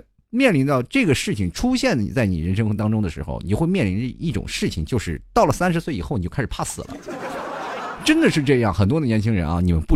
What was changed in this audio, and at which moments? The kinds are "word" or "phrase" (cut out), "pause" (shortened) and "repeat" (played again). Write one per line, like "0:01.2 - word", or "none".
none

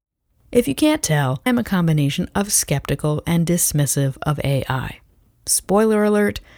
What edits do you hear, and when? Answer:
0:01.5 - word
0:03.2 - word

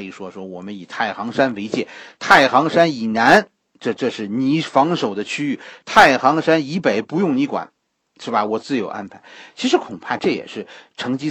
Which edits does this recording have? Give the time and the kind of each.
none

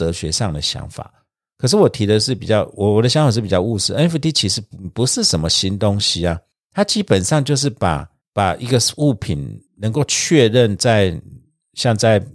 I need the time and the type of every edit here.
0:09.7 - pause

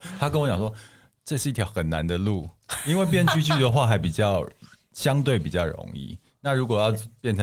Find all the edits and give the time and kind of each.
none

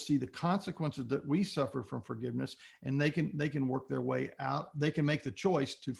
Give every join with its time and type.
none

